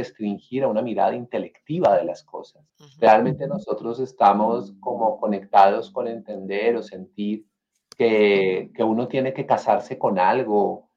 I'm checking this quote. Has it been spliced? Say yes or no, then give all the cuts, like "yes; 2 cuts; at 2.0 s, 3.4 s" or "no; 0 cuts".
yes; 1 cut; at 2.7 s